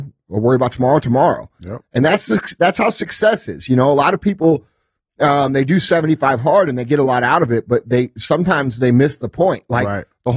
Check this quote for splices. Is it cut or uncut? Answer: uncut